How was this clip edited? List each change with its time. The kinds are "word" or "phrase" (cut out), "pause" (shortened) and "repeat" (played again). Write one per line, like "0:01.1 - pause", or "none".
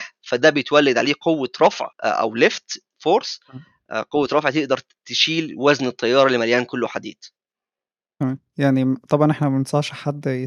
0:01.9 - pause

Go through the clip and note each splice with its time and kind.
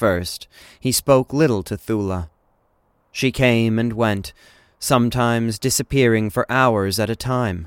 none

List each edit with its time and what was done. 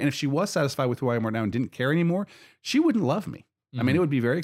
none

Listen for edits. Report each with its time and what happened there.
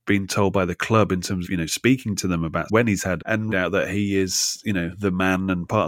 0:01.4 - word
0:02.7 - word
0:03.2 - word
0:03.5 - phrase

